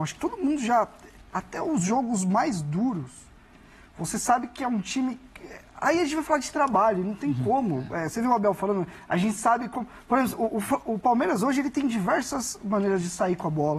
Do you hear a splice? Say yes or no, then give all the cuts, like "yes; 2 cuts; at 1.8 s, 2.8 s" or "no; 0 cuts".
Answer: no; 0 cuts